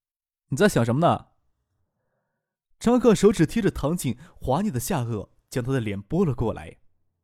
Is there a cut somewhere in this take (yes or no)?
no